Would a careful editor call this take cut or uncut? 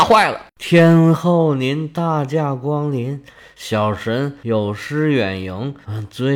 uncut